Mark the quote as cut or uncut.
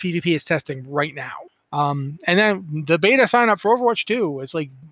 uncut